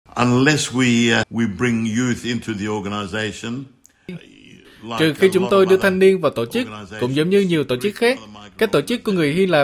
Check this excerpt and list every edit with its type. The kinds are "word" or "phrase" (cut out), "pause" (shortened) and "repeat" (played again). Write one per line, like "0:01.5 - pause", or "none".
0:01.2 - word